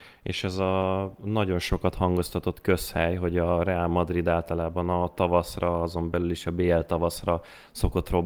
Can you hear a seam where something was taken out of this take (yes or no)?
no